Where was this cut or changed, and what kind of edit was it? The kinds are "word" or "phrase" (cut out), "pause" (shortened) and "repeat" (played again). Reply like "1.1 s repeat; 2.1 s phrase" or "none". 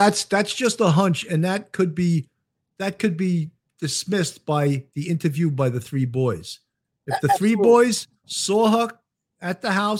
none